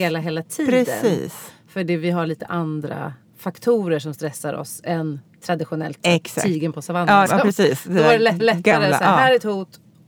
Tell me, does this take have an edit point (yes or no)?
yes